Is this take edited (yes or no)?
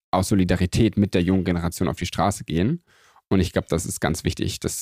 no